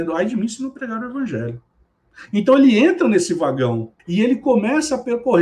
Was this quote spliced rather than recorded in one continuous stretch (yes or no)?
yes